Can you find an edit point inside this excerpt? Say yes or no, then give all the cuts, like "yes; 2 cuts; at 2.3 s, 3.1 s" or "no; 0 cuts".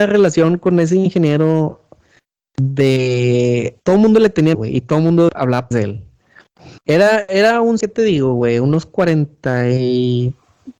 yes; 6 cuts; at 3.8 s, 4.5 s, 5.3 s, 5.7 s, 6.8 s, 7.8 s